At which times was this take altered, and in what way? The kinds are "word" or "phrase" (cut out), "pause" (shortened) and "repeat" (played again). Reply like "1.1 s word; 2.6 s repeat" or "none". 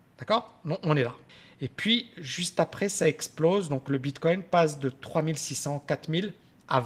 1.3 s pause